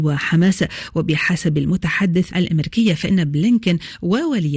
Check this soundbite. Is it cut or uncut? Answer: cut